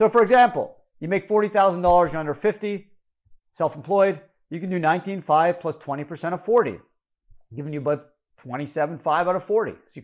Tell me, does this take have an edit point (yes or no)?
no